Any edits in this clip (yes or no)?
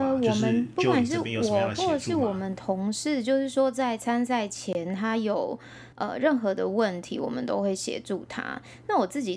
yes